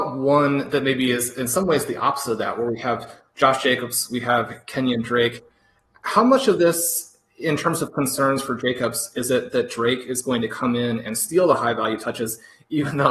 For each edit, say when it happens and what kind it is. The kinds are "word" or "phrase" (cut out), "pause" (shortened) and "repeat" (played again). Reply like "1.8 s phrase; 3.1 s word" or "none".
none